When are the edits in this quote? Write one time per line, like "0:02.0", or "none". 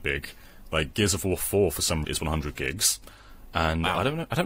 0:02.0